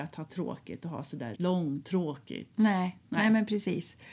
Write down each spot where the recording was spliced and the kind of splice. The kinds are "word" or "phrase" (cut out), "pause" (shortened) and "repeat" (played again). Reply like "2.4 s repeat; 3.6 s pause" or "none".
1.3 s word